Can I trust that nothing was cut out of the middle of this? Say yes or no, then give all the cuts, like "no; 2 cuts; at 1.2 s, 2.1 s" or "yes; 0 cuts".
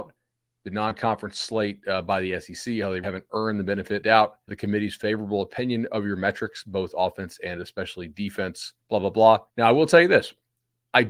no; 5 cuts; at 3.0 s, 4.0 s, 4.5 s, 8.8 s, 9.5 s